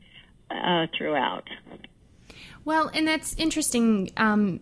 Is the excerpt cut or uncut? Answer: uncut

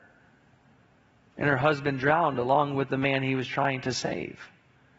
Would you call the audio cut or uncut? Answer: uncut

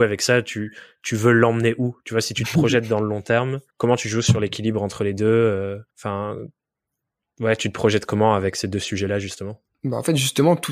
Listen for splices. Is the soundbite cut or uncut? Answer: cut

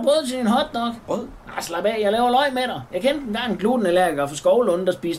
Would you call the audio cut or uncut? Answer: uncut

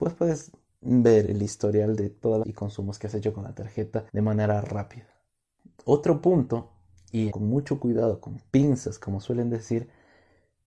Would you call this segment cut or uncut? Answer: cut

